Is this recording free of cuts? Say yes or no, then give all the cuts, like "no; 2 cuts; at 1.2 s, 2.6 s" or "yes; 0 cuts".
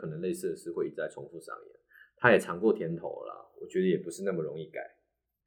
yes; 0 cuts